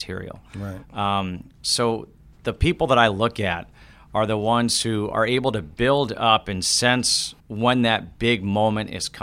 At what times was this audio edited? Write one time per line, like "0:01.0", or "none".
0:07.4